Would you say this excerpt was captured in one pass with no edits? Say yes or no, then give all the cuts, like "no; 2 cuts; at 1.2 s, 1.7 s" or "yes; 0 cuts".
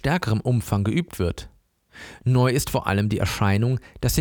yes; 0 cuts